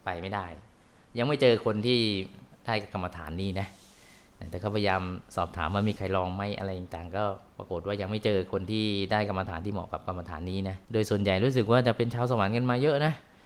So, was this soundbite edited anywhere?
yes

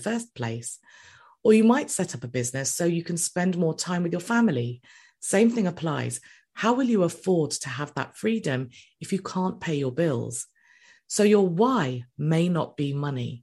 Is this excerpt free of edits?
yes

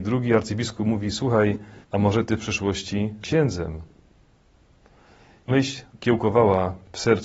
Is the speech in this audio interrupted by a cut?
yes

